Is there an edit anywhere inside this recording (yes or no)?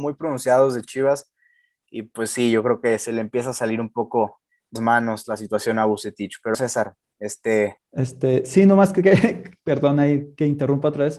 yes